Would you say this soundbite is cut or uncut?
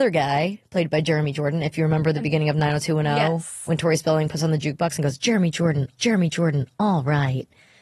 cut